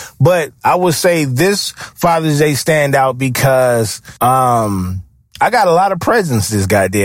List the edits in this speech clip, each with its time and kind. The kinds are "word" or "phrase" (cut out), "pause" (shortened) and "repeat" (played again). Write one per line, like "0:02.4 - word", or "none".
0:04.2 - pause